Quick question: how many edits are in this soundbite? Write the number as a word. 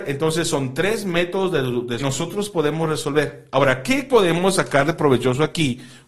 one